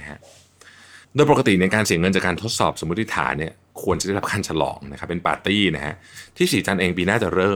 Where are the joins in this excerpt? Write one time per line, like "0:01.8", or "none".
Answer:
0:01.0